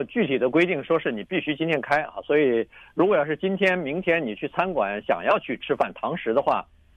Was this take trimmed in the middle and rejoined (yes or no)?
no